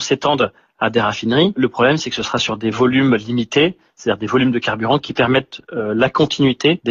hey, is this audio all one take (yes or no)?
yes